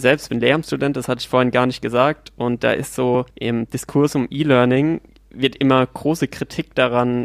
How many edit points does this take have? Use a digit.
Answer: 2